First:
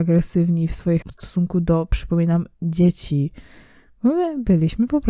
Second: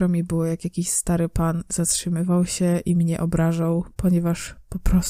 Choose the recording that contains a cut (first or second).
first